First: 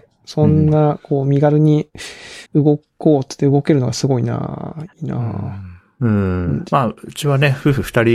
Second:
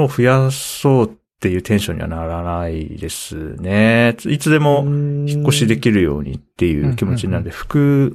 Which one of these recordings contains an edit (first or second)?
first